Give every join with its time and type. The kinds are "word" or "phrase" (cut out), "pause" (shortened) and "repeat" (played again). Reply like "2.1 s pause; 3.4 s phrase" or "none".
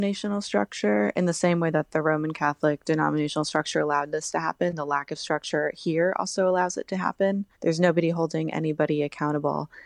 7.5 s pause